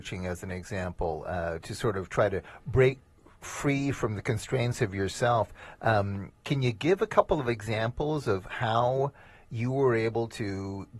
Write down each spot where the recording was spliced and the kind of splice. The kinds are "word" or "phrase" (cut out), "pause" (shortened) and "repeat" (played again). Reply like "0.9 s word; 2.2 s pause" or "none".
none